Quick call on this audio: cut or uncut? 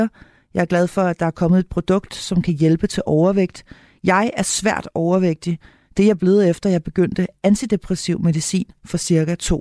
uncut